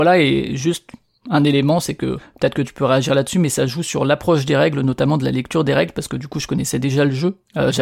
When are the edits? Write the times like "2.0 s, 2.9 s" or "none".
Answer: none